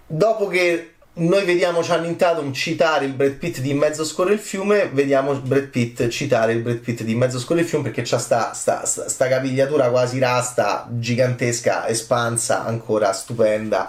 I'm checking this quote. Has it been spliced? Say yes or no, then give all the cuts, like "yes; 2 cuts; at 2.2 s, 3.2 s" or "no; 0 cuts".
yes; 1 cut; at 1.0 s